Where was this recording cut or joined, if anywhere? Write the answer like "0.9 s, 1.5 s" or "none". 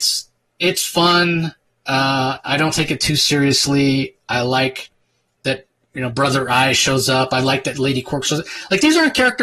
none